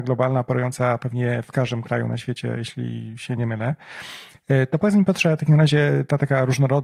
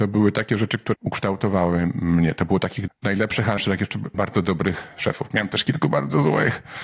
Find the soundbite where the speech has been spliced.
second; 4 cuts; at 0.9 s, 2.9 s, 3.6 s, 4.1 s

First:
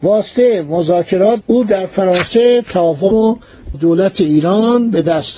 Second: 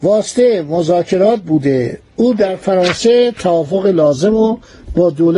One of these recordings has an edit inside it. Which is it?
first; 3 cuts; at 1.4 s, 3.1 s, 3.7 s

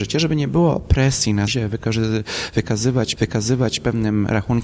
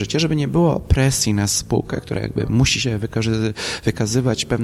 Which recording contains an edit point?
first; 2 cuts; at 1.5 s, 3.2 s

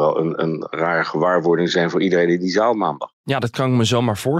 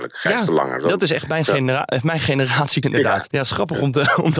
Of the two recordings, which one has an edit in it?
second; 2 cuts; at 2.8 s, 3.3 s

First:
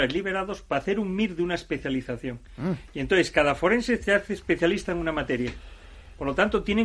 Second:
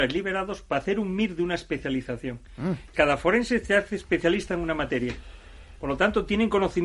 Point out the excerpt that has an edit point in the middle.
second; 1 cut; at 2.9 s

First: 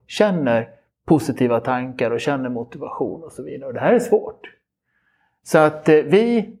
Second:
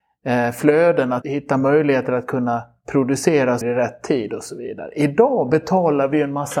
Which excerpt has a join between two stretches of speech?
second; 2 cuts; at 1.2 s, 3.6 s

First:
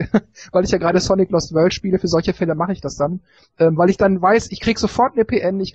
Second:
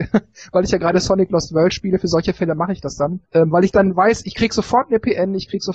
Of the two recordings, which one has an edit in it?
second; 1 cut; at 3.2 s

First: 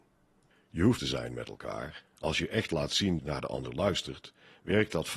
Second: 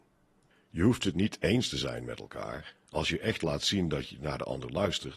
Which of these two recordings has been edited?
first; 2 cuts; at 1.0 s, 3.2 s

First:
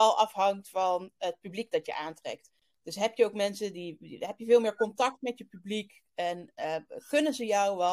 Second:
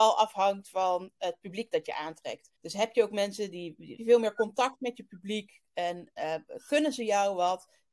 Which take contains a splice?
second; 2 cuts; at 2.6 s, 4.0 s

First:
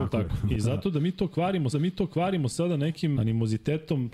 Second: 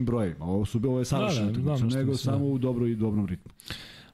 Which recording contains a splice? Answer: first; 2 cuts; at 1.7 s, 3.2 s

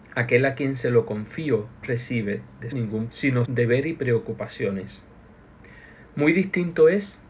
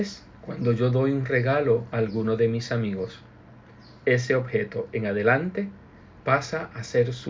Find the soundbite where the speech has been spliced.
first; 4 cuts; at 1.8 s, 2.7 s, 3.1 s, 3.5 s

